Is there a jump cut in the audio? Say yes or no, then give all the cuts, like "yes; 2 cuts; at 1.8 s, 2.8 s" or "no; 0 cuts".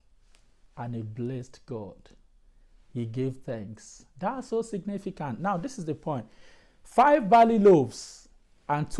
no; 0 cuts